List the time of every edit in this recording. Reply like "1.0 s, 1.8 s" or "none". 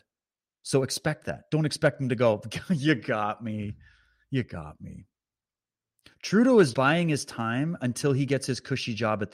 5.8 s, 6.7 s